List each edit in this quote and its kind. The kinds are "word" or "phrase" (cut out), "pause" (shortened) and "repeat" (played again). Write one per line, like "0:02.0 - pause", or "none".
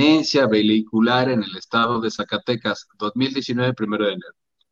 none

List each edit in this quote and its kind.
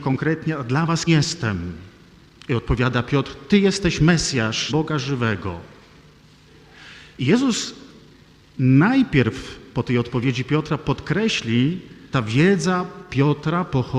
0:01.1 - word
0:04.7 - word
0:12.1 - word

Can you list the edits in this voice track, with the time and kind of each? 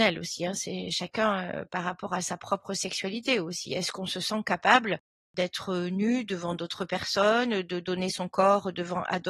none

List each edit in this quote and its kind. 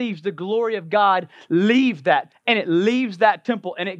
0:02.3 - word

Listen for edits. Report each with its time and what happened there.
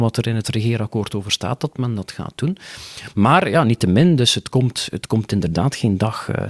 none

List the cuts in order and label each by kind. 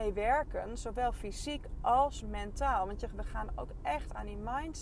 none

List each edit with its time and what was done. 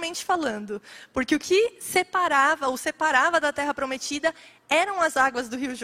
none

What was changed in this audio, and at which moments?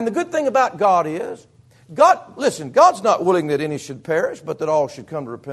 none

